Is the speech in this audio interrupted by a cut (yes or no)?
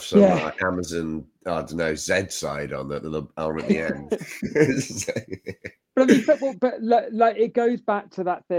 no